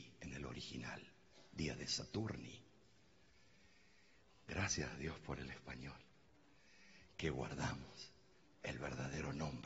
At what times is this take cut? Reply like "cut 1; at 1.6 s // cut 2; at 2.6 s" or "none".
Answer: none